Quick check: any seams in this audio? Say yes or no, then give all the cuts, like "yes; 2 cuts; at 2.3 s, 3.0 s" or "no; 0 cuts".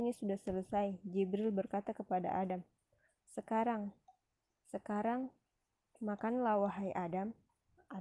no; 0 cuts